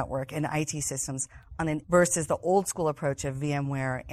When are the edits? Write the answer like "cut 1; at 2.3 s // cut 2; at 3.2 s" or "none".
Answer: cut 1; at 1.8 s